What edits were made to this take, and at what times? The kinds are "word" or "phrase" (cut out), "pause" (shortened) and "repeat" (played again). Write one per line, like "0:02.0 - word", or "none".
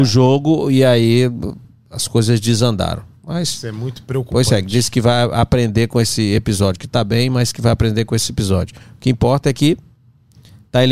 none